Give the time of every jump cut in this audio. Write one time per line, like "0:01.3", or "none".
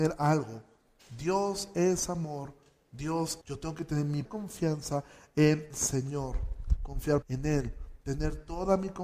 0:03.4
0:04.3
0:05.7
0:07.2